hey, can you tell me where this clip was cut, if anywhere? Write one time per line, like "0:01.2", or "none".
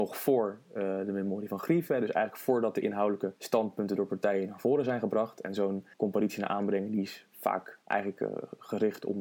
0:03.4
0:05.9
0:07.8